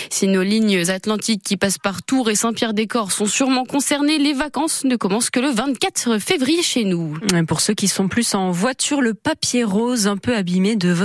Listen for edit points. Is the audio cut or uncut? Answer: uncut